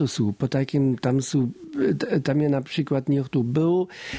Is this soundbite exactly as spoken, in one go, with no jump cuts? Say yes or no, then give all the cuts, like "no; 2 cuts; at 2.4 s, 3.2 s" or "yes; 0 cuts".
yes; 0 cuts